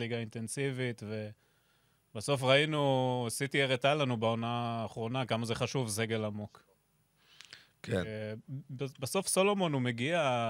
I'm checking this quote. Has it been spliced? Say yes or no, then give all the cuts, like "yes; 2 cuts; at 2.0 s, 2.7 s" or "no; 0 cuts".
no; 0 cuts